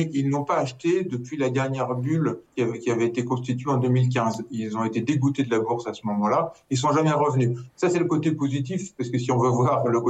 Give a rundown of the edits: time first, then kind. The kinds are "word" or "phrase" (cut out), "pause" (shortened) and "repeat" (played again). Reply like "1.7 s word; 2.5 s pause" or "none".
2.5 s pause